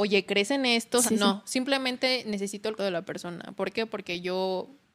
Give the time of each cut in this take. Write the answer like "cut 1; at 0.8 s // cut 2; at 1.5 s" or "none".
cut 1; at 1.1 s // cut 2; at 2.8 s